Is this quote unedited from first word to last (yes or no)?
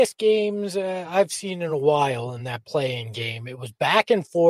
yes